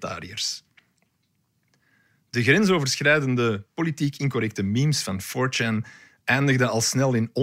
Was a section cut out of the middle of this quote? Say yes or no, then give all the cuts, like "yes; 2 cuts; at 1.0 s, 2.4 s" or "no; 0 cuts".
no; 0 cuts